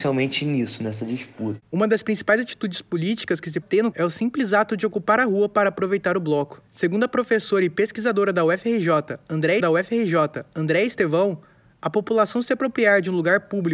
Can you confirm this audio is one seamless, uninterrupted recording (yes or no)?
no